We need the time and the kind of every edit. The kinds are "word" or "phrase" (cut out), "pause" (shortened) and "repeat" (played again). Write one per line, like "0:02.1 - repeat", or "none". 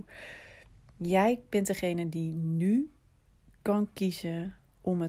none

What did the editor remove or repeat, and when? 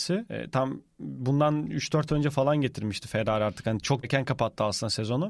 0:02.1 - word
0:04.0 - word

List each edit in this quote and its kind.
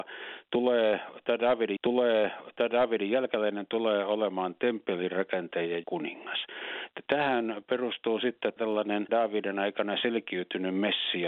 0:01.8 - repeat
0:05.8 - phrase
0:08.6 - word
0:09.1 - word

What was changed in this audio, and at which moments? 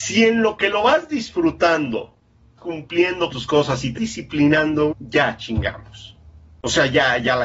0:02.6 - word
0:03.3 - word
0:04.0 - word
0:04.9 - word

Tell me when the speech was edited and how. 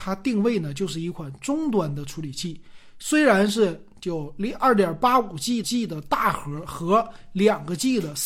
0:05.6 - repeat

